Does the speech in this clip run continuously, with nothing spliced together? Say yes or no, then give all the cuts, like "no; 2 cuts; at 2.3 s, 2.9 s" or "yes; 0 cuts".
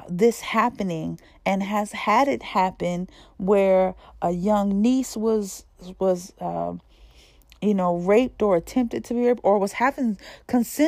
yes; 0 cuts